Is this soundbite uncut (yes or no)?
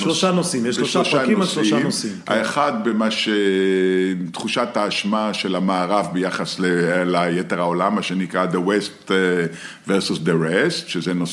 yes